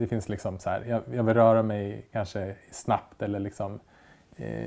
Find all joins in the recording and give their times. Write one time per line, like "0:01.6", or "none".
none